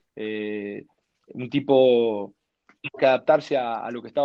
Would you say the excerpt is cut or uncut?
cut